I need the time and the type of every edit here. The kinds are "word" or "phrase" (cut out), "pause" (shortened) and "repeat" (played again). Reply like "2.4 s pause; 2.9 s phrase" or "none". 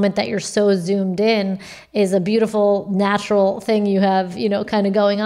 none